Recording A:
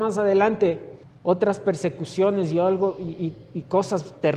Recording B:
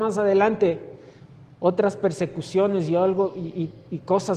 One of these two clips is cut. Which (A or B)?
A